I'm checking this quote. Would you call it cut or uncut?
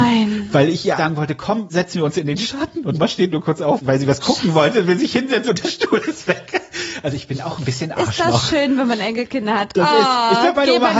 cut